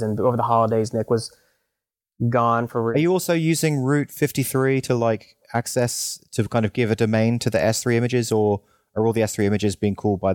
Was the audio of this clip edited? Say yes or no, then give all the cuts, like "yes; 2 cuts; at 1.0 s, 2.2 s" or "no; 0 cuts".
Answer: no; 0 cuts